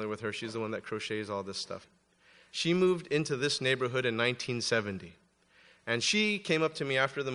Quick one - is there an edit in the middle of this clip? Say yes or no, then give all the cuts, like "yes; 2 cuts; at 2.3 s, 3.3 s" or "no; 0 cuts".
no; 0 cuts